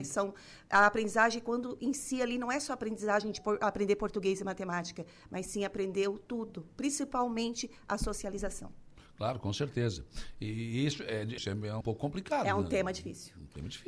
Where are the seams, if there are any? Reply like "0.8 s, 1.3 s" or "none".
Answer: 11.4 s, 11.8 s